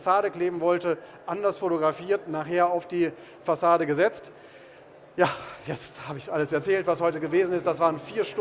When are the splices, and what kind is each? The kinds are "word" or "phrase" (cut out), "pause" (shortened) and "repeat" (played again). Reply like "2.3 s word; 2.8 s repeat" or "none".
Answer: none